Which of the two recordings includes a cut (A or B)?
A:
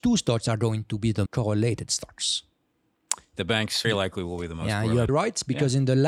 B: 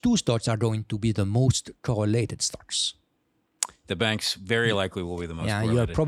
A